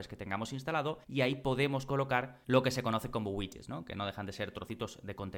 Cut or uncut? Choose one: cut